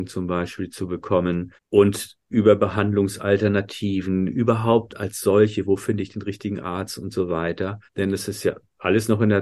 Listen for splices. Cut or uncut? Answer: cut